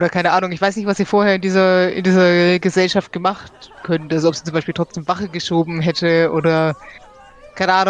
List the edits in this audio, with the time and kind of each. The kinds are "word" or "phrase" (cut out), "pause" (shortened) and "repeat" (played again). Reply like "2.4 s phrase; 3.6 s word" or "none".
3.8 s word